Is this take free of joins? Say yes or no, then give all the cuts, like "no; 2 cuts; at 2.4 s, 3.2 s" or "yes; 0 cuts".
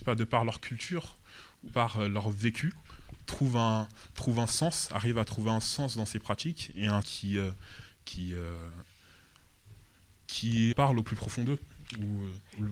no; 3 cuts; at 1.7 s, 7.0 s, 10.7 s